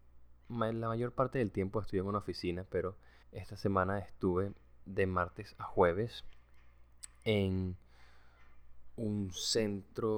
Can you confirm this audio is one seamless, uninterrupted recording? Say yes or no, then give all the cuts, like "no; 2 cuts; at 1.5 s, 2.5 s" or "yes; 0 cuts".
no; 1 cut; at 3.2 s